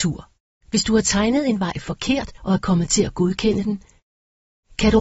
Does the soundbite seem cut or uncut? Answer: cut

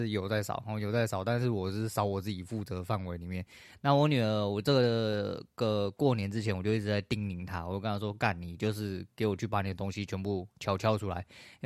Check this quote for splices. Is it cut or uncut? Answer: uncut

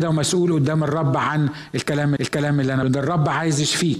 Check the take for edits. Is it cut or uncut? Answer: cut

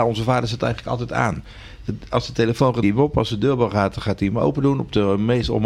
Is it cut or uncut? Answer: cut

